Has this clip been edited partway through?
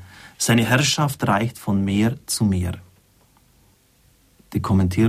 no; 0 cuts

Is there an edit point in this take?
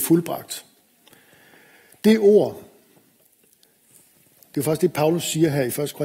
no; 0 cuts

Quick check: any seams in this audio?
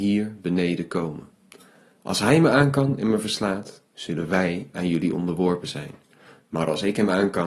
no; 0 cuts

